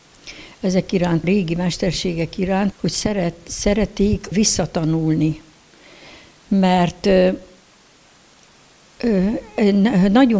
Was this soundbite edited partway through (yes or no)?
yes